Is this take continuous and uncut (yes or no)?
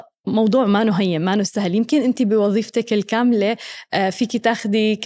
yes